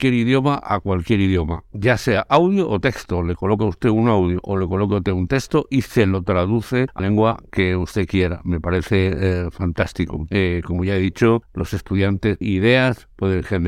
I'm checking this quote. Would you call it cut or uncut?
cut